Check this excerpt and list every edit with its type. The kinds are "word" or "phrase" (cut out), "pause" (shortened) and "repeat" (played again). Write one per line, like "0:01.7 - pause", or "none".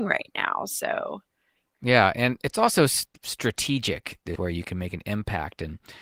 0:03.1 - pause
0:04.4 - phrase

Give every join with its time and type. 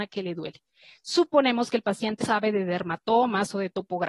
0:02.2 - word

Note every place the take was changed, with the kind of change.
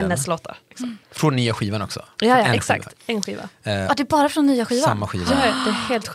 0:01.0 - pause

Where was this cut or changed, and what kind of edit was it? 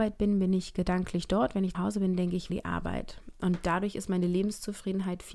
0:01.7 - word
0:02.5 - phrase

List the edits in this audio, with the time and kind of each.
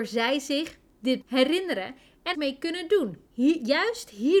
0:01.2 - word
0:02.3 - phrase
0:03.3 - pause

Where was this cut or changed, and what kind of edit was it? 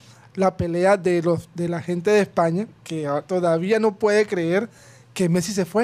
none

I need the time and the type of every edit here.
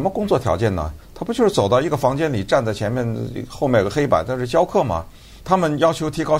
0:01.0 - pause
0:05.4 - pause

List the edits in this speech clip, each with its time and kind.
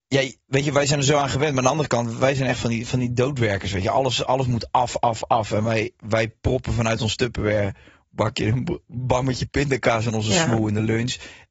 none

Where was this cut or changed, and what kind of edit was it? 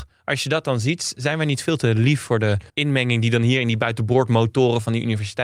0:02.7 - pause

